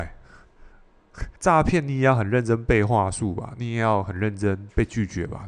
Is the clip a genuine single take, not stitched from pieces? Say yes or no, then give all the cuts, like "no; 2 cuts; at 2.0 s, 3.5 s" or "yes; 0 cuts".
no; 1 cut; at 1.4 s